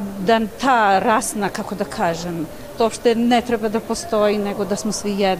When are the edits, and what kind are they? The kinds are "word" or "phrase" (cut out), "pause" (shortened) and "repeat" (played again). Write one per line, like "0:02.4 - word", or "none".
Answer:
0:02.7 - word